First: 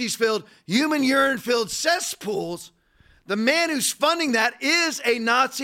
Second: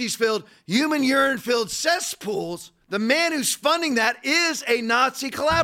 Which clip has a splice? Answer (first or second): second